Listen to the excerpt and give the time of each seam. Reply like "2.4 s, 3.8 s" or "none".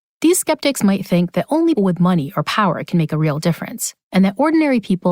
1.8 s, 4.0 s